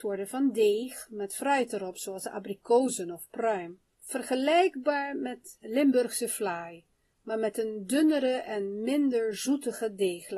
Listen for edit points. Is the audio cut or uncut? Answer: uncut